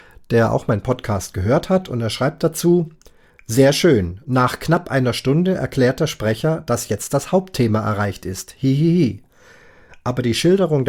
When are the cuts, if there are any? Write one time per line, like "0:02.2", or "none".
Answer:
none

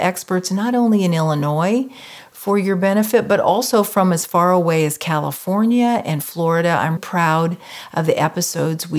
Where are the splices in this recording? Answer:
0:07.0

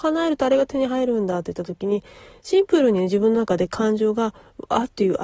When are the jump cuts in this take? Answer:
none

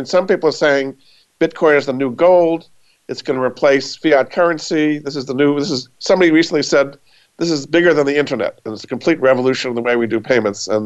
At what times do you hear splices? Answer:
none

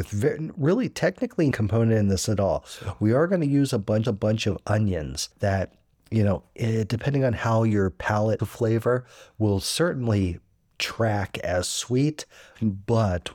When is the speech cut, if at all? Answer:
0:01.5
0:04.1
0:05.3
0:08.4

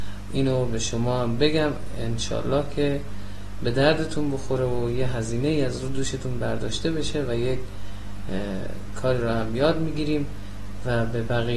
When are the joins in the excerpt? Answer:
none

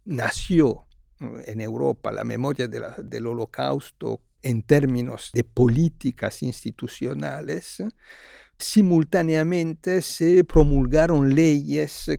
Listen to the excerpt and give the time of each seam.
none

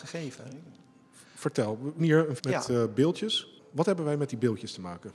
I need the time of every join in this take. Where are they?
0:02.0
0:02.4

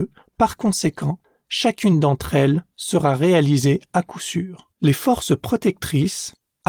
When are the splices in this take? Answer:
0:04.7

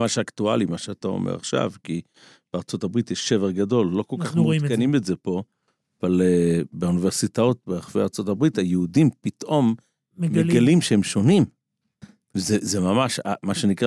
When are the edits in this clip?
none

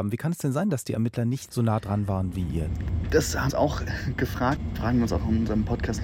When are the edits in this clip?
0:03.5

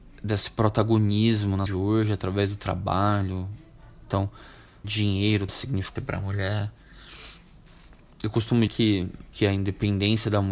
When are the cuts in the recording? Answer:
0:01.7
0:04.8
0:05.5
0:06.0
0:08.7
0:09.3

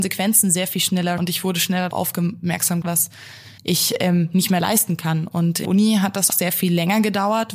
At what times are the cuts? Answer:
0:01.2
0:01.9
0:02.8
0:03.6
0:05.6
0:06.3

